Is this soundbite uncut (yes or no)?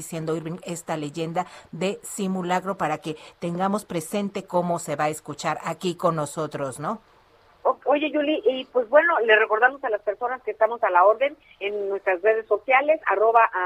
yes